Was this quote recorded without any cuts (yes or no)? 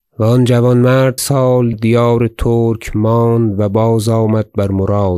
no